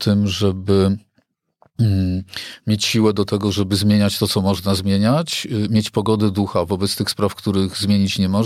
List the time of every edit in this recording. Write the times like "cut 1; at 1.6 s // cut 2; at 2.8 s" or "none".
none